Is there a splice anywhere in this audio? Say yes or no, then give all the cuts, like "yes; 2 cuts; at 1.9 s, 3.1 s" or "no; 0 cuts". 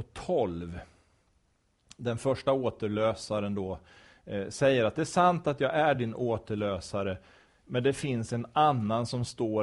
no; 0 cuts